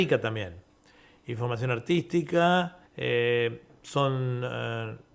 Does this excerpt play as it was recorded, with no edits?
no; 1 cut; at 2.9 s

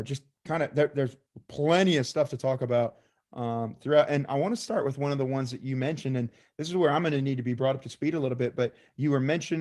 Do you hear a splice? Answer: no; 0 cuts

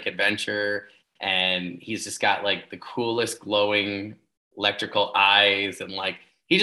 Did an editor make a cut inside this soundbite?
no; 0 cuts

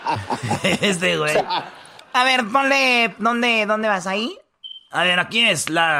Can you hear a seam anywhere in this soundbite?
no; 0 cuts

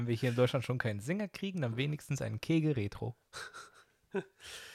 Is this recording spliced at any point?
no; 0 cuts

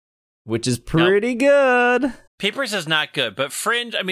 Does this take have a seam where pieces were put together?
yes; 1 cut; at 2.3 s

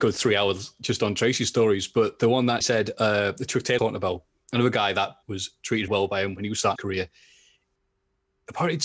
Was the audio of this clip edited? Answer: yes; 5 cuts; at 2.6 s, 3.8 s, 5.2 s, 5.9 s, 6.8 s

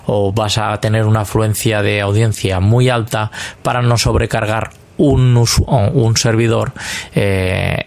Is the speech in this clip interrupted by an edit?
no; 0 cuts

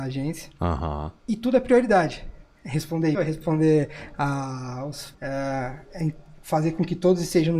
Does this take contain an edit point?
yes; 3 cuts; at 1.2 s, 3.1 s, 5.1 s

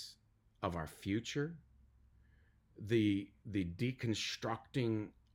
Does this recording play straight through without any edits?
yes; 0 cuts

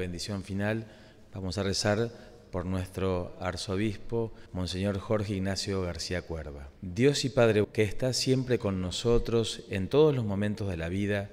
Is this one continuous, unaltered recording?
no; 3 cuts; at 4.5 s, 6.8 s, 7.6 s

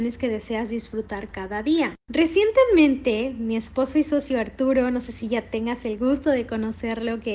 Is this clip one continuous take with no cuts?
yes; 0 cuts

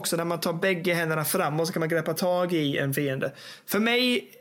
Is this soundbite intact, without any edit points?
yes; 0 cuts

